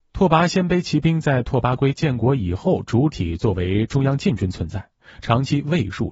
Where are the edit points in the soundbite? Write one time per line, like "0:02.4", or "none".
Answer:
none